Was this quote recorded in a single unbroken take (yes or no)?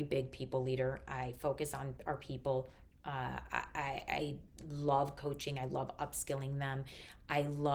yes